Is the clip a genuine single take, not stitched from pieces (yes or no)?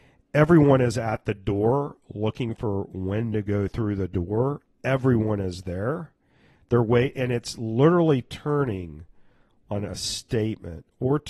yes